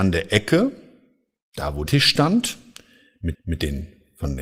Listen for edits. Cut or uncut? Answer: cut